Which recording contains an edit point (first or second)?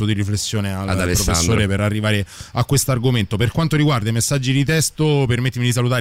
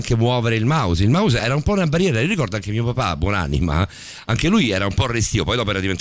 second